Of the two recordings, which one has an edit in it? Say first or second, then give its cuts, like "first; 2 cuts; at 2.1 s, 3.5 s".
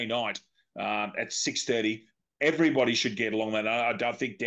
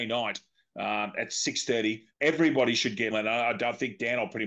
second; 2 cuts; at 2.1 s, 3.1 s